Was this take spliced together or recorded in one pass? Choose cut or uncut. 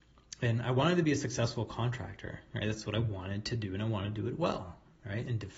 uncut